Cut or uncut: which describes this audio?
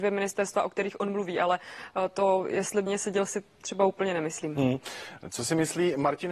cut